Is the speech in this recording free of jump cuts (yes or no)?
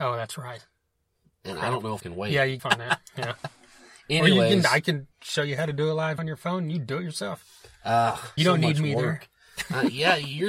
no